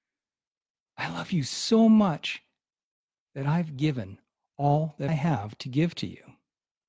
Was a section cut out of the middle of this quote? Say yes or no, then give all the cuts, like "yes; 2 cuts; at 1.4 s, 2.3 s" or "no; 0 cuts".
yes; 1 cut; at 5.1 s